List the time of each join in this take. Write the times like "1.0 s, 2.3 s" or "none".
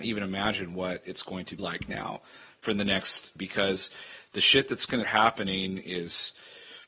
1.6 s, 3.4 s, 5.0 s